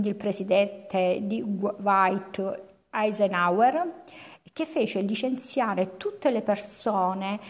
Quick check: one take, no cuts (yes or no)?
yes